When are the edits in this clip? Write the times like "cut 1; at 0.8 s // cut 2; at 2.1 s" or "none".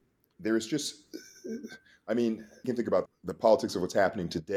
cut 1; at 2.6 s // cut 2; at 3.1 s